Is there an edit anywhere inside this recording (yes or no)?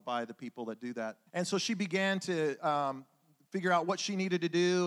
yes